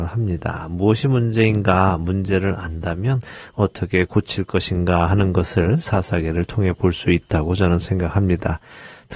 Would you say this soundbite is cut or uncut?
uncut